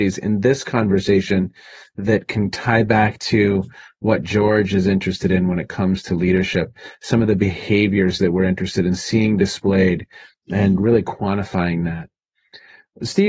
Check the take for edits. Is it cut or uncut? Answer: uncut